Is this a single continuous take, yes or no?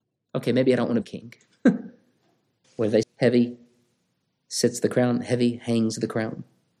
no